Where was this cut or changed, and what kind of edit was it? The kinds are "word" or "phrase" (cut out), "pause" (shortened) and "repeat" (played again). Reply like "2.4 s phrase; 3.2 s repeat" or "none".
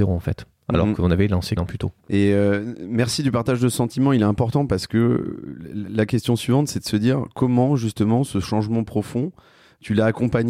1.6 s phrase; 2.0 s pause